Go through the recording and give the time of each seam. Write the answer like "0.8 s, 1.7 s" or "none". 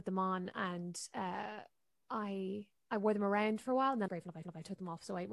2.8 s, 4.1 s, 4.4 s